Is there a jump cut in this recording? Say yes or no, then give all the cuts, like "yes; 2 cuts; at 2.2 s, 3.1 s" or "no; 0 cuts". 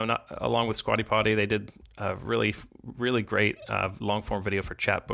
no; 0 cuts